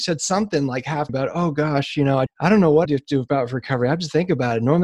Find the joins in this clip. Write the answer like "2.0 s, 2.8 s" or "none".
1.1 s, 2.3 s, 2.9 s